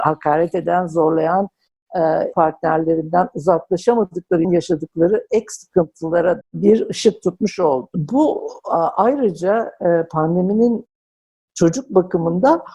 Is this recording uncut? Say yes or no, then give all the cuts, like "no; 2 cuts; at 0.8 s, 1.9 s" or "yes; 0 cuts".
no; 3 cuts; at 2.3 s, 4.4 s, 6.4 s